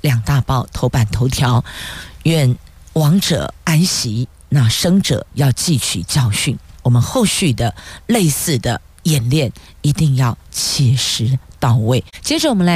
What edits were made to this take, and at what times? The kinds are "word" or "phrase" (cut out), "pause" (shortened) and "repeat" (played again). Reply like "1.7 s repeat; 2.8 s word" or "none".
3.6 s pause